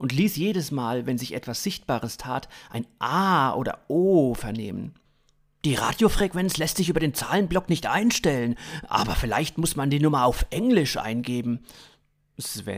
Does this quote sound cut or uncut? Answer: uncut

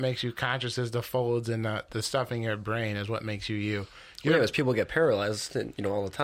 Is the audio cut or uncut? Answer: uncut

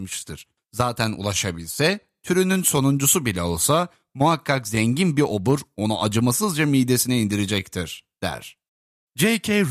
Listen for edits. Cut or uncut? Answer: uncut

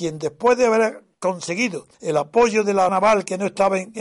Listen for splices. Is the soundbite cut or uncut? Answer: cut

